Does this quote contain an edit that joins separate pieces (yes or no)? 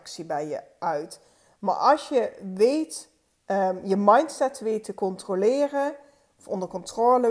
no